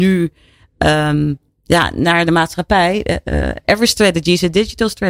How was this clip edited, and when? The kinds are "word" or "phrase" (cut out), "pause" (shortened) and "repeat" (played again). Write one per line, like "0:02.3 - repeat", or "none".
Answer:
0:03.6 - word